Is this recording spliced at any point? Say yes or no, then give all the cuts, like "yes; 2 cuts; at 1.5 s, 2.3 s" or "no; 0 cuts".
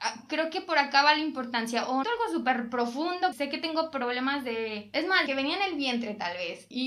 yes; 3 cuts; at 2.0 s, 3.3 s, 5.3 s